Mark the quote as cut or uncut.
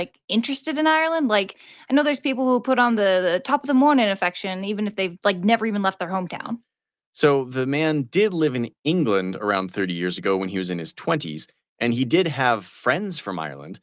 uncut